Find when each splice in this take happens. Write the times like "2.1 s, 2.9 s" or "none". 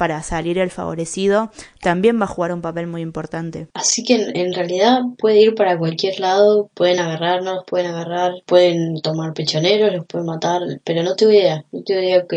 none

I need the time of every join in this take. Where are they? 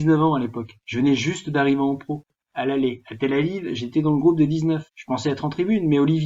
4.9 s

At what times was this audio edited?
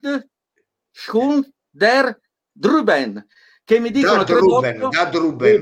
none

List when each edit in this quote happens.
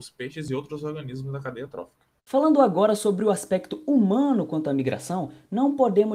2.2 s

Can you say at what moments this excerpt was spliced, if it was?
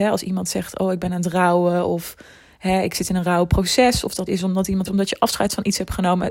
4.3 s, 4.9 s

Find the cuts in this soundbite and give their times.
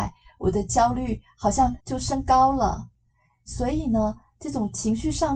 1.8 s

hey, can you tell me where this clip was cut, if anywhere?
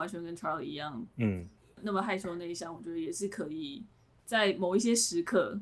none

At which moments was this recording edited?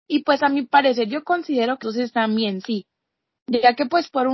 1.8 s

